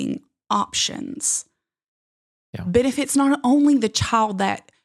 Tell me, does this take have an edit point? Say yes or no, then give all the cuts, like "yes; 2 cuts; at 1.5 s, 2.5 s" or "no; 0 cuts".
no; 0 cuts